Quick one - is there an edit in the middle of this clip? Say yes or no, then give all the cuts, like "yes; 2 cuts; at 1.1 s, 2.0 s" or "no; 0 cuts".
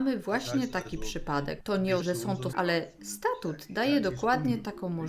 yes; 2 cuts; at 2.0 s, 2.5 s